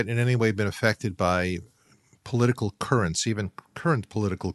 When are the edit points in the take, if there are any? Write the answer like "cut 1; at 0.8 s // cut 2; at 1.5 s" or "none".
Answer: none